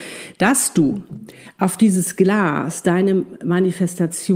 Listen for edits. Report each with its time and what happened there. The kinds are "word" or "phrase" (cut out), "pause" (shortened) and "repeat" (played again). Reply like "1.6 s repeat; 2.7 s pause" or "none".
none

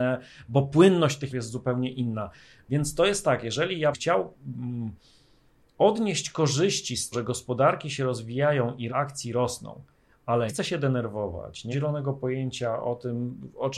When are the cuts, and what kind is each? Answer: 1.3 s word; 3.9 s word; 7.1 s word; 8.9 s word; 10.5 s word; 11.7 s word

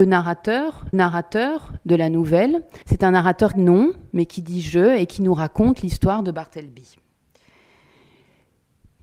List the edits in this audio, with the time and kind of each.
0.9 s repeat; 2.8 s pause; 3.5 s phrase

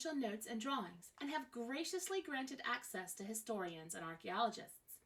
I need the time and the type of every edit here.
none

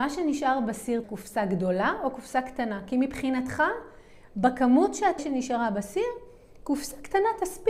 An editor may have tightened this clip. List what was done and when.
1.0 s word; 5.2 s word

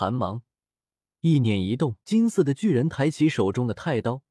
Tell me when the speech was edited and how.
2.0 s pause

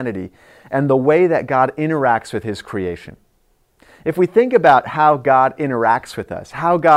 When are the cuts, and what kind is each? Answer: none

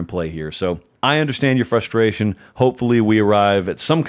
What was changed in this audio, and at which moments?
0.9 s word

